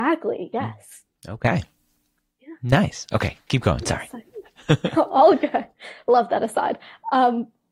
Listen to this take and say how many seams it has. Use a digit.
0